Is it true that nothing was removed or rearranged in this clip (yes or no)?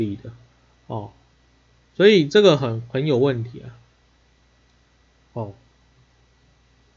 yes